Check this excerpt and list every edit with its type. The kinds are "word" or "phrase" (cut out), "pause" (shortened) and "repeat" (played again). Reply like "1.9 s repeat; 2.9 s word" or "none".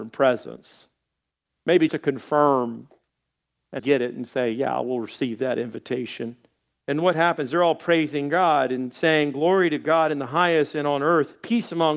1.9 s word; 3.8 s phrase; 6.7 s pause